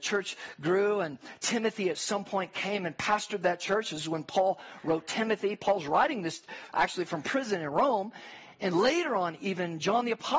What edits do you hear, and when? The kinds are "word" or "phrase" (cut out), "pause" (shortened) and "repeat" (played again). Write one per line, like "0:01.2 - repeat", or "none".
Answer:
none